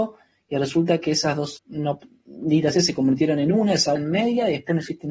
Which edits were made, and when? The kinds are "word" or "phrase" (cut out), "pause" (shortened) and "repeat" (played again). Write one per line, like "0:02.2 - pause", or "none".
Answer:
0:01.6 - word
0:02.7 - word
0:04.0 - word